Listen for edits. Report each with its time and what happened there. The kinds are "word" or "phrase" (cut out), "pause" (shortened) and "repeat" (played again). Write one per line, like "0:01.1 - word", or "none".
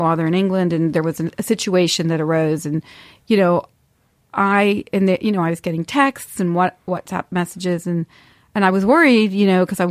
none